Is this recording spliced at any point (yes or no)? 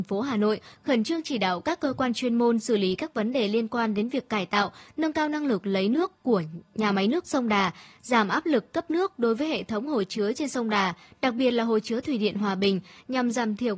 no